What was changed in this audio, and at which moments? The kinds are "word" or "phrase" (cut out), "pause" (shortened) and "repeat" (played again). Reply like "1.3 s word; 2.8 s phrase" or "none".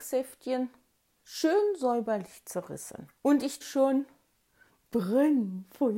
3.2 s pause; 3.6 s word